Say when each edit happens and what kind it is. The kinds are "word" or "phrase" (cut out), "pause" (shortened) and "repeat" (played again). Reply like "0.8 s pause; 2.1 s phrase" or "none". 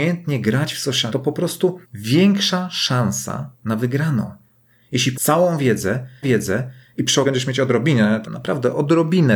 1.1 s word; 1.8 s pause; 3.5 s pause; 5.1 s word; 6.2 s repeat; 7.2 s word; 8.2 s word